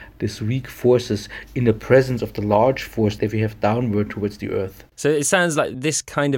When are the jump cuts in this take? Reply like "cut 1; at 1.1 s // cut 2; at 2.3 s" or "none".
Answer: cut 1; at 4.9 s